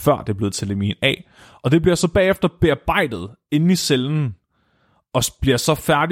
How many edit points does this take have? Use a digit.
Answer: 0